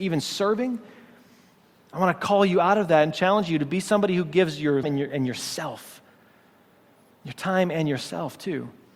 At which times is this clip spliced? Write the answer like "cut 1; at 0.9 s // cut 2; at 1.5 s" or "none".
cut 1; at 4.8 s

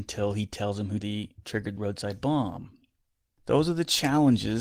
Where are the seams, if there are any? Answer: cut 1; at 1.0 s // cut 2; at 1.8 s

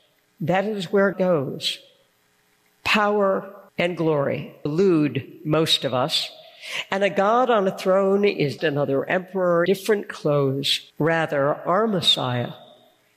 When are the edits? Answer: cut 1; at 1.1 s // cut 2; at 3.7 s // cut 3; at 4.7 s // cut 4; at 8.6 s // cut 5; at 9.7 s // cut 6; at 10.9 s

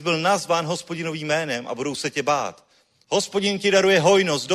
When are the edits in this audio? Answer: none

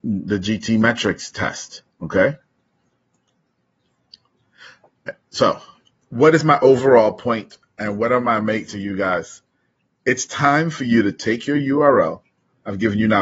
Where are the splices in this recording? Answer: cut 1; at 1.9 s // cut 2; at 8.7 s

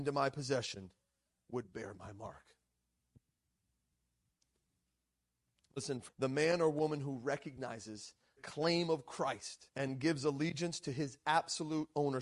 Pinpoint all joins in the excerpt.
cut 1; at 6.1 s // cut 2; at 8.4 s // cut 3; at 9.7 s

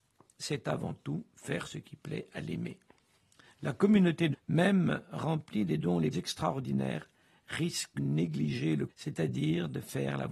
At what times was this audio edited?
cut 1; at 4.3 s // cut 2; at 6.1 s // cut 3; at 8.0 s // cut 4; at 8.9 s

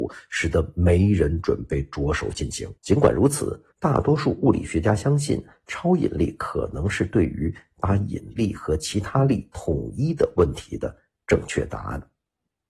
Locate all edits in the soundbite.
cut 1; at 2.8 s // cut 2; at 3.7 s

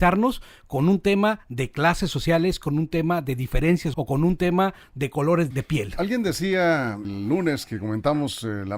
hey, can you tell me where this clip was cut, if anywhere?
cut 1; at 3.9 s // cut 2; at 5.5 s // cut 3; at 7.0 s

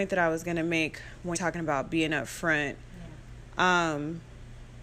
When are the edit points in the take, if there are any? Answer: cut 1; at 1.3 s

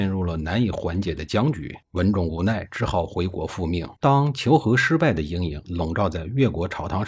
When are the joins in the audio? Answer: cut 1; at 1.8 s // cut 2; at 4.0 s

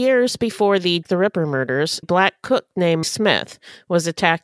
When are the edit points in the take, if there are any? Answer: cut 1; at 1.0 s // cut 2; at 2.0 s // cut 3; at 3.0 s

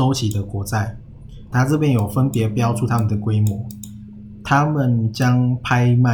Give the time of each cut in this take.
cut 1; at 1.5 s

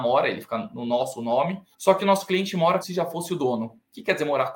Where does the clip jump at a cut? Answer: cut 1; at 1.7 s // cut 2; at 2.8 s

